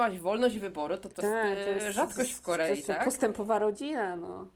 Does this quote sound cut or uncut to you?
cut